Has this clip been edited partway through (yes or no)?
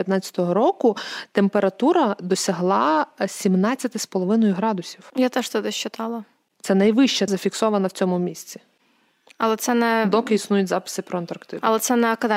yes